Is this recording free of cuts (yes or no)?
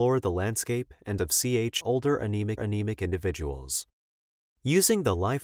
no